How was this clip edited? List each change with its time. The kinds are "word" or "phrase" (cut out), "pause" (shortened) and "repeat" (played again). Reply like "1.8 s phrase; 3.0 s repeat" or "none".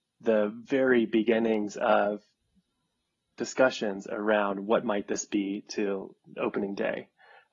none